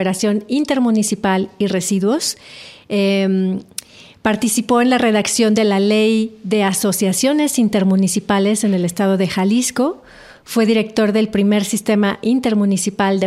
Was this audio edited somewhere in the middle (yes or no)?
no